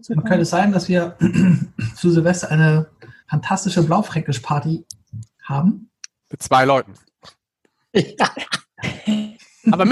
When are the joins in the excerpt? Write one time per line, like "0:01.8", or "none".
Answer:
0:03.2
0:05.3